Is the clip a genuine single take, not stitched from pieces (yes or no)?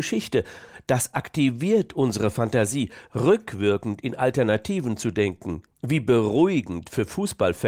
no